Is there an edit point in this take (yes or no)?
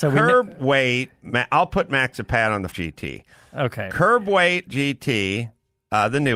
yes